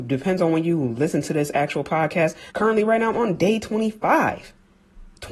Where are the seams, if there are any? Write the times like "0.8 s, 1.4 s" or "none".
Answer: 2.5 s